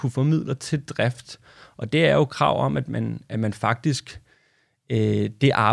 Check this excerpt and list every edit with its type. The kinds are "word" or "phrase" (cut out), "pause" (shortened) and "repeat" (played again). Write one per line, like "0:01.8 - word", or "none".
none